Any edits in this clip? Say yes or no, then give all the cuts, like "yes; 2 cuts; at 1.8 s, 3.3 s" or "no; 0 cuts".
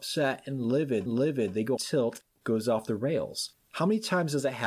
yes; 3 cuts; at 1.1 s, 1.8 s, 2.4 s